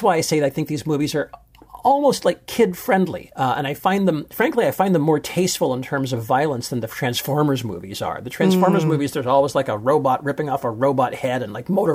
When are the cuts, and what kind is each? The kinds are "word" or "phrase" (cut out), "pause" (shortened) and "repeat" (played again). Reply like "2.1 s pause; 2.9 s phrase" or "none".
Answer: none